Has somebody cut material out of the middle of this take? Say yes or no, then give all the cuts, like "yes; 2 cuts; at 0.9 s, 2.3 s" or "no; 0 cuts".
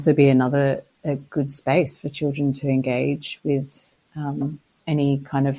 no; 0 cuts